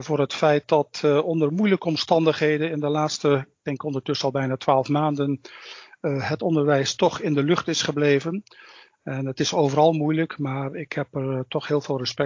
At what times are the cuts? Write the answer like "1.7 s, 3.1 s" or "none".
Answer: none